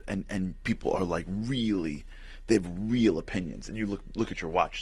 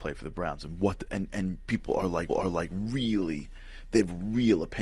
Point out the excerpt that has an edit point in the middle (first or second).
second